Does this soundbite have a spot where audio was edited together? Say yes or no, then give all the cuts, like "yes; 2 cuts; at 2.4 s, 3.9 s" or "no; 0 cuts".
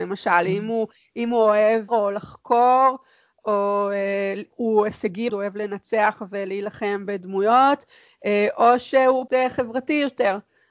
yes; 3 cuts; at 1.9 s, 5.3 s, 9.3 s